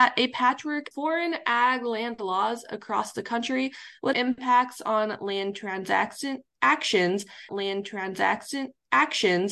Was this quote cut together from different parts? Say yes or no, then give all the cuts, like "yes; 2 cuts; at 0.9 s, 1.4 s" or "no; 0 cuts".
yes; 3 cuts; at 0.9 s, 4.1 s, 7.5 s